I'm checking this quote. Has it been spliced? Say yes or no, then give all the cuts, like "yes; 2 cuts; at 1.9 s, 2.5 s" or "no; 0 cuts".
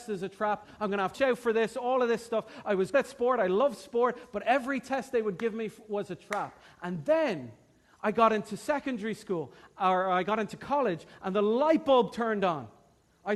yes; 2 cuts; at 1.1 s, 2.9 s